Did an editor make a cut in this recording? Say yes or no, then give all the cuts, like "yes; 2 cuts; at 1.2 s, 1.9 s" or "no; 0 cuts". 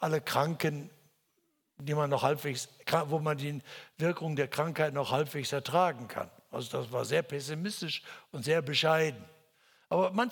no; 0 cuts